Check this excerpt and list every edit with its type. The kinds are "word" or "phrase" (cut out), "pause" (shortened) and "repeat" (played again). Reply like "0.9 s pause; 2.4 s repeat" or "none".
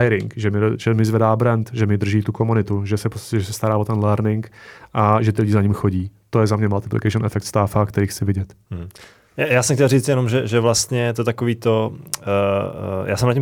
none